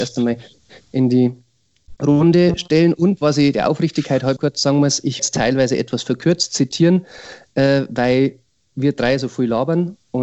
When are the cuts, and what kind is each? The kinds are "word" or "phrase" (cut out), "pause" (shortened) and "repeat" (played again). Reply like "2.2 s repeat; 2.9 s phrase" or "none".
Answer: 4.4 s word; 5.2 s word